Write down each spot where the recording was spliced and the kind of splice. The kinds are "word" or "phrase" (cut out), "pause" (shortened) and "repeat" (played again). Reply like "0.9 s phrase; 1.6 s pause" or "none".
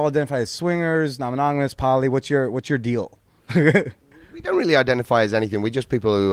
3.3 s pause